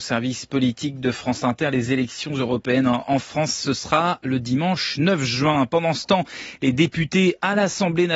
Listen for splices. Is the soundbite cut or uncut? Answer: uncut